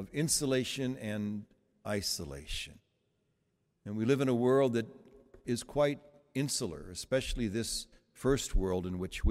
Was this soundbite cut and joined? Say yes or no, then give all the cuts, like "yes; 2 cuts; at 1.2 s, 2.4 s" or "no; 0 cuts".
no; 0 cuts